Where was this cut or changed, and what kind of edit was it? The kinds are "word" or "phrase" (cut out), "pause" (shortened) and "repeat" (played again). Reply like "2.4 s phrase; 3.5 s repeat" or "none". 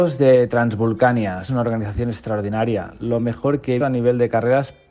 1.5 s word; 3.8 s word